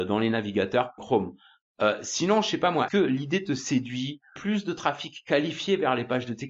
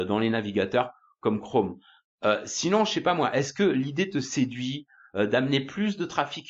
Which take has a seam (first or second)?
first